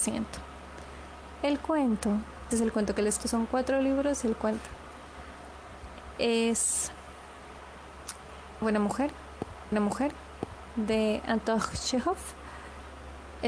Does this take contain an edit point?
yes; 4 cuts; at 2.5 s, 3.2 s, 8.6 s, 9.7 s

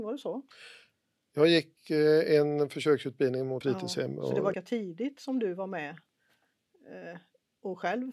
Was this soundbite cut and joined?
yes; 2 cuts; at 3.6 s, 4.5 s

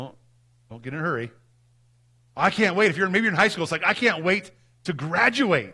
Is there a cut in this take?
no; 0 cuts

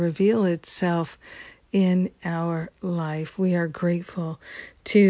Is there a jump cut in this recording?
no; 0 cuts

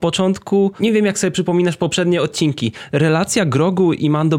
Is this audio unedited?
yes; 0 cuts

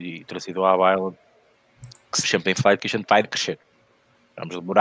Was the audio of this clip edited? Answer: yes; 3 cuts; at 2.2 s, 2.8 s, 3.2 s

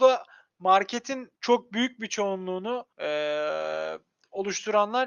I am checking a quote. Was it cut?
yes; 2 cuts; at 1.4 s, 2.9 s

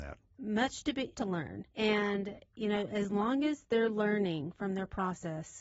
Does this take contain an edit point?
yes; 2 cuts; at 1.1 s, 1.7 s

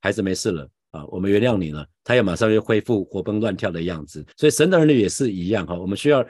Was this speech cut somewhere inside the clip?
yes; 1 cut; at 4.3 s

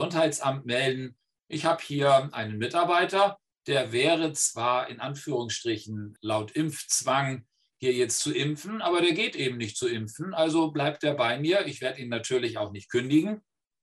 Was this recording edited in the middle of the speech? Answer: no; 0 cuts

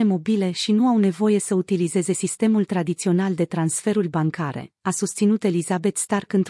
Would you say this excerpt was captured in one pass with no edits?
yes; 0 cuts

